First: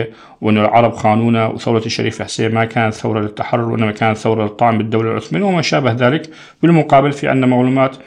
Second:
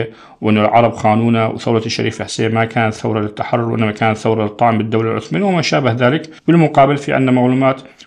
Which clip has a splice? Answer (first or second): second